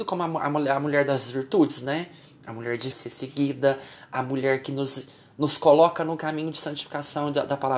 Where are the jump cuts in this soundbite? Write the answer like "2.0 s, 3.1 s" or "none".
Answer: 2.9 s